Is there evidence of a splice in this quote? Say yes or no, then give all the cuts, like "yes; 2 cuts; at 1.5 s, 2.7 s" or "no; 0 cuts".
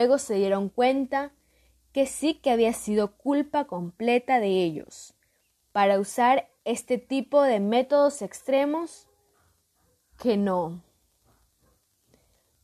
yes; 1 cut; at 6.6 s